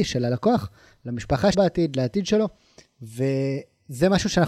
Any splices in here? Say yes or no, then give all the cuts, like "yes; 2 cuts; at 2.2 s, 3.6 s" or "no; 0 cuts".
yes; 1 cut; at 1.5 s